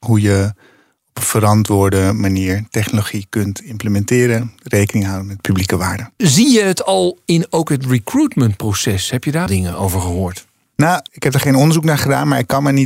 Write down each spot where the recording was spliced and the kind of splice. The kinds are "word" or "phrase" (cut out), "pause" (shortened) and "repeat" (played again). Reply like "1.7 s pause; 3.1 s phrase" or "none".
9.5 s word; 11.1 s pause